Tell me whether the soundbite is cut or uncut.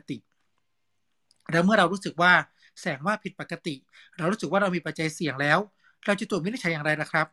uncut